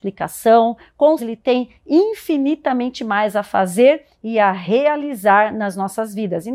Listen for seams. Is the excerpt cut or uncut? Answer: cut